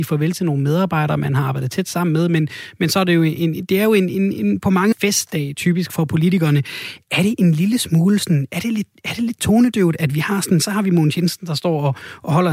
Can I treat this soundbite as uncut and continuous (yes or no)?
no